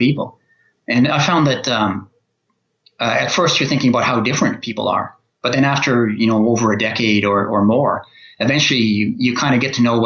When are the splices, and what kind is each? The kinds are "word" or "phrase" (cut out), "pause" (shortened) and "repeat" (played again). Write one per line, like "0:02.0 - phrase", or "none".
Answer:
none